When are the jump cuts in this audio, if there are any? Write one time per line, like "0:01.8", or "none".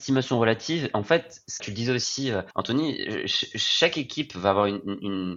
0:01.6
0:02.5